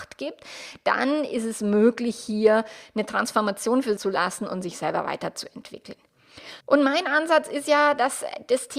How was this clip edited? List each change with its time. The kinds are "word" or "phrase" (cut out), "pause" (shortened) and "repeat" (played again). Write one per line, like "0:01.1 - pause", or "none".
0:04.0 - phrase
0:06.6 - pause